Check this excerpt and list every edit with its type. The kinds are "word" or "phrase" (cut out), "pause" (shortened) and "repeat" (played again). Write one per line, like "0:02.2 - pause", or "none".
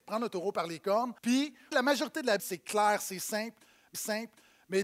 0:01.2 - pause
0:01.7 - word
0:02.4 - word
0:03.9 - repeat